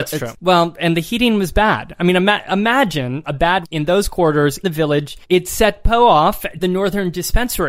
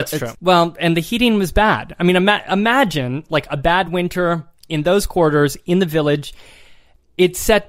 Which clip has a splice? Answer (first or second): first